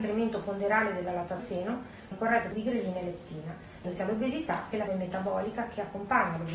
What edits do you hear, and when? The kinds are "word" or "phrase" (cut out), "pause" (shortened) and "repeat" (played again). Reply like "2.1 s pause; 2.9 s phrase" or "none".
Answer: 1.4 s word; 2.1 s word; 2.5 s word; 3.8 s word; 4.9 s word